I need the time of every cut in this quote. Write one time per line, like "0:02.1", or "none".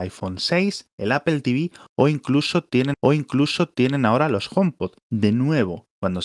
0:02.9
0:05.0

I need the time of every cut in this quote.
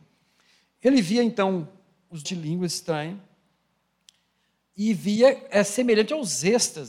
0:02.3

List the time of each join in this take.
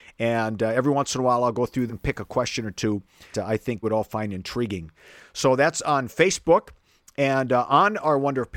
0:01.9
0:03.3
0:03.8

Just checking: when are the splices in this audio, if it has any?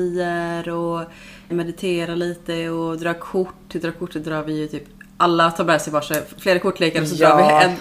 0:01.5

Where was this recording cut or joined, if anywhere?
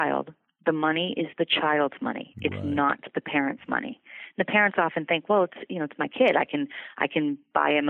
none

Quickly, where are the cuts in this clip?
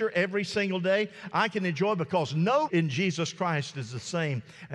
0:02.7

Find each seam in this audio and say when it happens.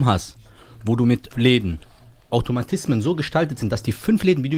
0:01.3
0:02.3

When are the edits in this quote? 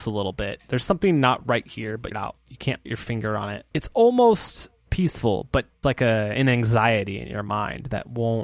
0:02.1
0:02.9
0:03.7
0:05.8

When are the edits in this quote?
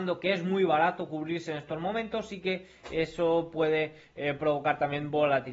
none

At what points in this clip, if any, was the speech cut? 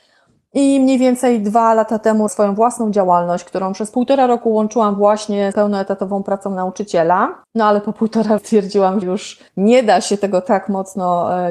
0:02.3
0:05.5
0:07.4
0:08.4
0:09.0
0:09.5

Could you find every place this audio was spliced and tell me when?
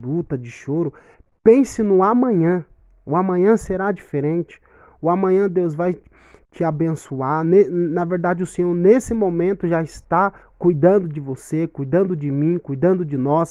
none

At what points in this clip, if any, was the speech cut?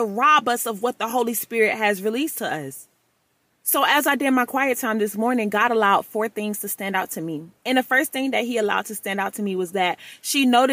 none

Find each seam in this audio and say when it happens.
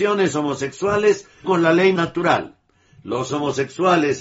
0:01.4
0:02.0
0:03.3

